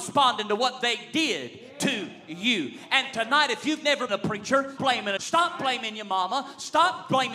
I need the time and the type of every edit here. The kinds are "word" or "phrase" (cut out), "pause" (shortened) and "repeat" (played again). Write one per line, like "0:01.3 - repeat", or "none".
0:04.1 - phrase
0:04.8 - word
0:05.2 - phrase

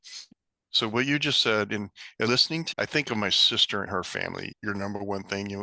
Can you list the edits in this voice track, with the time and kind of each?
0:02.3 - word
0:02.7 - word
0:03.9 - word

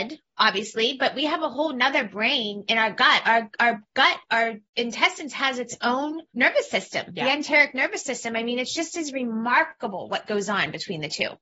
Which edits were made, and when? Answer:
0:04.7 - pause
0:06.3 - pause

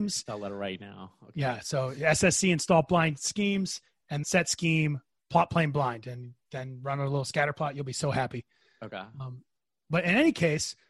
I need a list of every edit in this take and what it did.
0:04.2 - word

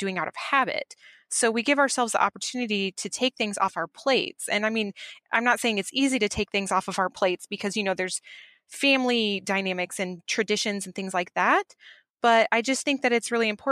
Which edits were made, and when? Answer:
none

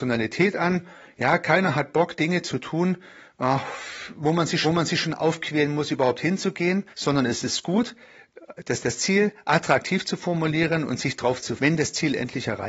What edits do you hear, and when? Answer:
0:04.6 - repeat
0:06.9 - pause
0:08.8 - repeat
0:11.6 - word

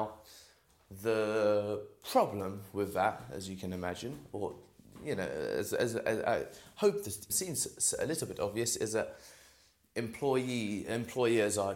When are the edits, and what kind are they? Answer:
0:07.3 - word

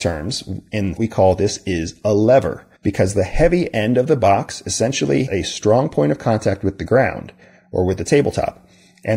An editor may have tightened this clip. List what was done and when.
0:01.0 - phrase
0:02.7 - pause
0:05.3 - word

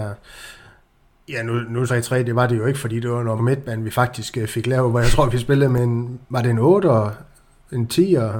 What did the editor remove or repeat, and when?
0:01.9 - phrase
0:03.4 - word
0:06.2 - pause

